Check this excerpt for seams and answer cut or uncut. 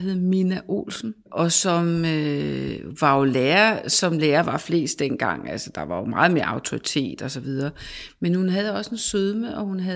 uncut